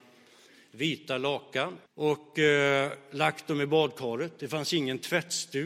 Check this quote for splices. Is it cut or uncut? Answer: cut